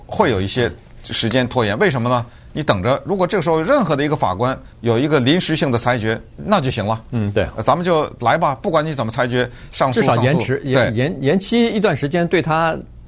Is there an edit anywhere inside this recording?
yes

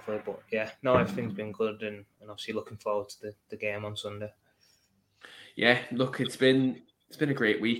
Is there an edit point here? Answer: no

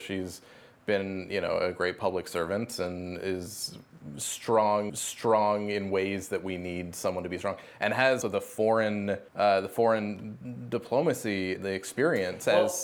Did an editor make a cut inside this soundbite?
yes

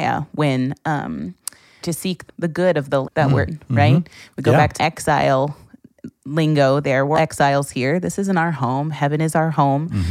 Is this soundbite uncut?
no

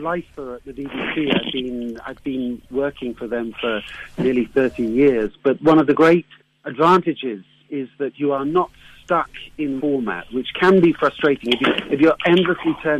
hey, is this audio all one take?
no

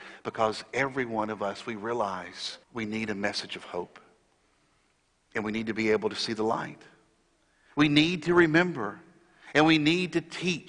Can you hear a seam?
yes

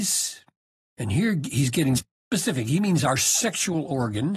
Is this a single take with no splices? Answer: no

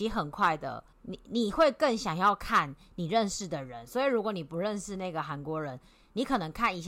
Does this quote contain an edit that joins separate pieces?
yes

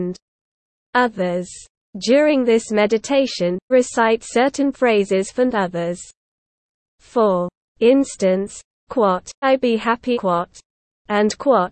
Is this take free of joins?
no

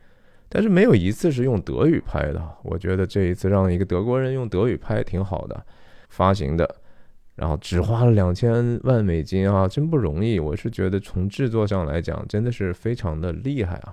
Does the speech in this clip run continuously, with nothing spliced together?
no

